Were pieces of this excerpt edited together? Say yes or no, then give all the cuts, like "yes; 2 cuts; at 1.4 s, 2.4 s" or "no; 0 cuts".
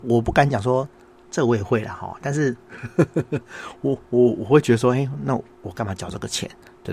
no; 0 cuts